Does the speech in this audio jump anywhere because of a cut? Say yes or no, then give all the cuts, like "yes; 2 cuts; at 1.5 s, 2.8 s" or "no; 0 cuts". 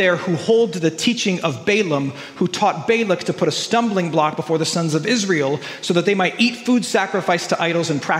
no; 0 cuts